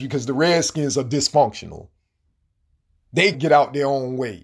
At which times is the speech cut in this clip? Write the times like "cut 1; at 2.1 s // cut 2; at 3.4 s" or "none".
cut 1; at 3.3 s